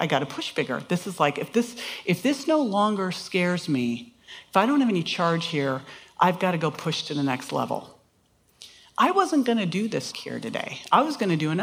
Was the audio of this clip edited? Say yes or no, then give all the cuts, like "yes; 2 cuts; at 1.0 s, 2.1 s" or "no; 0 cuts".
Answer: yes; 1 cut; at 10.1 s